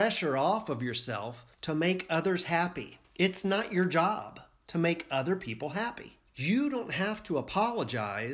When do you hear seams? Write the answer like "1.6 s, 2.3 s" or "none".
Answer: 1.5 s, 3.0 s, 6.3 s